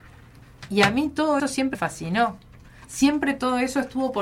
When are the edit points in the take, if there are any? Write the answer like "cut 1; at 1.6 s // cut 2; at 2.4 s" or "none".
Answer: cut 1; at 1.4 s // cut 2; at 1.7 s